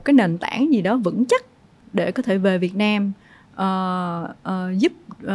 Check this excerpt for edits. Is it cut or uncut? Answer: uncut